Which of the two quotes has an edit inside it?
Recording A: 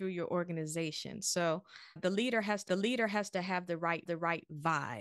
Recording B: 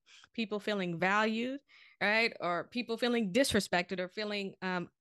A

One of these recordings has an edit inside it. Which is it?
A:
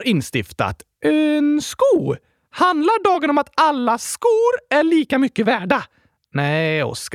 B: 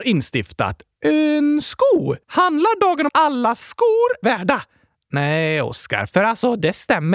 B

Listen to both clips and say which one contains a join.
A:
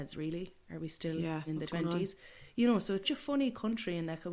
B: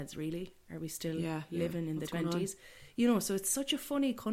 A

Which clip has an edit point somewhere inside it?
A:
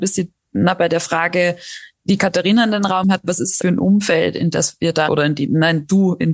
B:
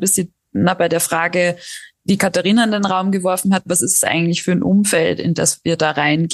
A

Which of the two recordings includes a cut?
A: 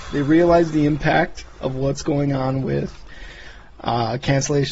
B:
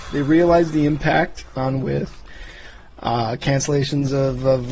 B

